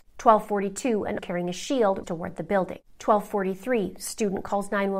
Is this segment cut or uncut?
cut